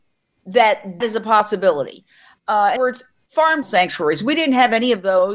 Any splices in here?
yes; 3 cuts; at 1.0 s, 2.8 s, 3.6 s

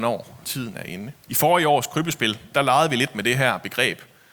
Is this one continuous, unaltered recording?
no; 1 cut; at 1.2 s

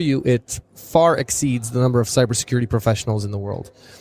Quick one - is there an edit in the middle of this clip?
no; 0 cuts

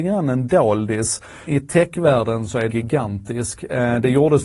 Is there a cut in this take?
yes; 2 cuts; at 1.5 s, 2.7 s

